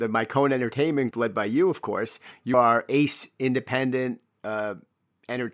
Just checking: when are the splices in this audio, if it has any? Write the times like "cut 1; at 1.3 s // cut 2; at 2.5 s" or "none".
cut 1; at 1.1 s // cut 2; at 2.5 s